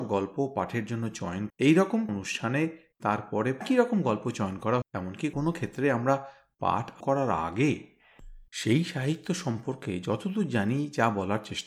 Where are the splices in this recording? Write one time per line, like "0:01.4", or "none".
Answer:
0:01.5
0:02.1
0:03.6
0:04.8
0:05.3
0:07.0
0:08.5